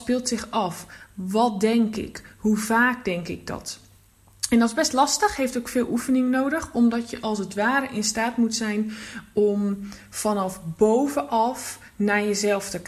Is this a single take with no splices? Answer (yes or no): yes